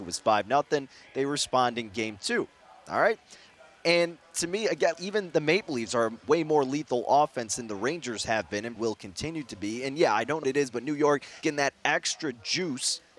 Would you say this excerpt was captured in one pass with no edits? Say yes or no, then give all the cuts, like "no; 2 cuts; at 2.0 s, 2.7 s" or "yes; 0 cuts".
no; 4 cuts; at 4.9 s, 8.8 s, 10.4 s, 11.4 s